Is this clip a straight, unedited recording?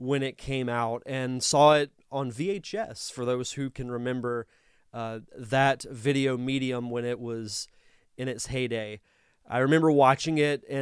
yes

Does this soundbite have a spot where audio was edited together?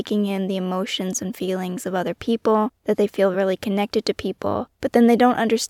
no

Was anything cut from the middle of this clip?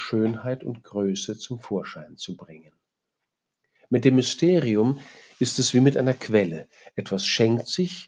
no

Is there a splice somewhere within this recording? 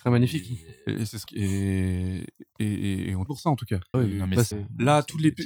yes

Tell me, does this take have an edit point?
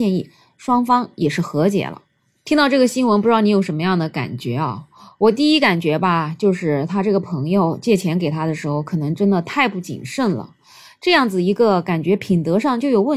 no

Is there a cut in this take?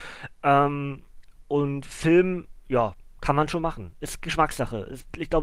no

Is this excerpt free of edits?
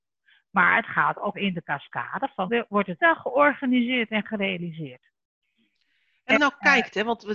no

